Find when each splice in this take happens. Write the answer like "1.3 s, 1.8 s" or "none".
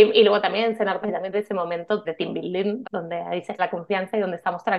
1.0 s, 1.3 s, 2.0 s, 2.8 s, 3.6 s

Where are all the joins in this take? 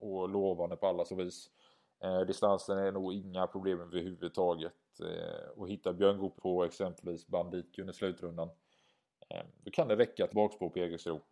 1.1 s, 6.4 s, 7.7 s, 10.3 s

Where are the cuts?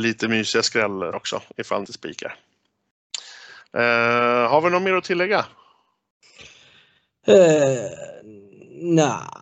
1.1 s, 1.9 s

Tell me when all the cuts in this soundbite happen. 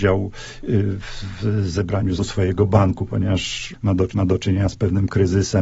2.2 s, 4.1 s

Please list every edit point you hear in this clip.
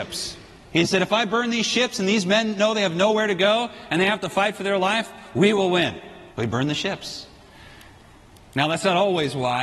6.3 s

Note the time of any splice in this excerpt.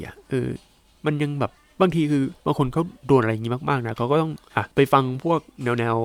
1.6 s, 2.4 s, 4.7 s

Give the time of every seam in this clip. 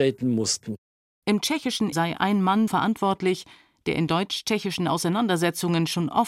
1.9 s, 2.7 s, 4.1 s

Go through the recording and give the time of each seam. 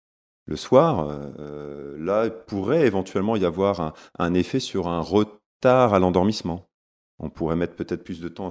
none

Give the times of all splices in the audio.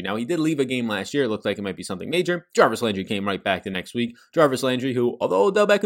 none

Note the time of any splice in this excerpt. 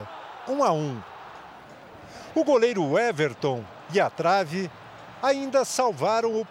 none

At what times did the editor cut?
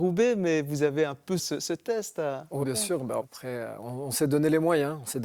1.4 s, 2.6 s, 3.2 s

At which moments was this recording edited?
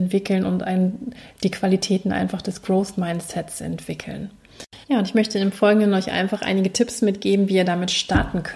4.8 s

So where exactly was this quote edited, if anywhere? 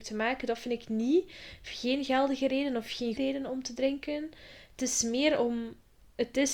3.2 s

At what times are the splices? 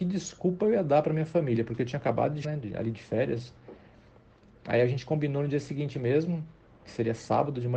2.4 s

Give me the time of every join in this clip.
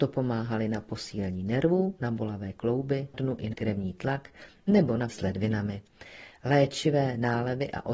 3.1 s, 3.5 s, 5.1 s

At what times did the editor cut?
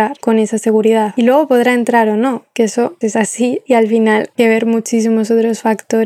3.0 s, 4.4 s

